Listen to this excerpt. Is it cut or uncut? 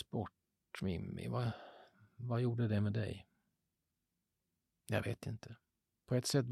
uncut